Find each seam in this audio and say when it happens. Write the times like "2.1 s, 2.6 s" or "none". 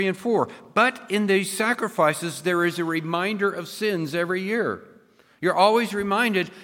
none